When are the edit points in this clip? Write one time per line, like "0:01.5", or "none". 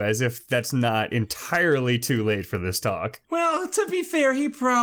0:03.2

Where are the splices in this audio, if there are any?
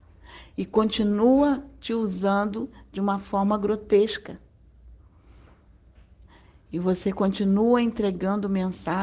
none

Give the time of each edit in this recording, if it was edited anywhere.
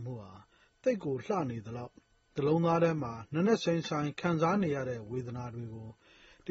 none

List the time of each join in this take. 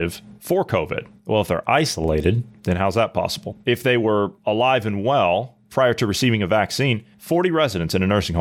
0:04.4

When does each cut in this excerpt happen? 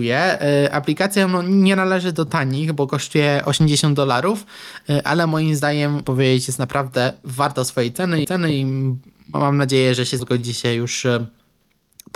0:06.0
0:08.2
0:10.2

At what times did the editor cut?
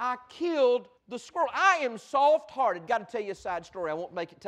0:01.0

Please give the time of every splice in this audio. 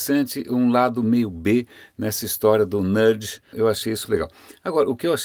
0:03.5
0:04.0

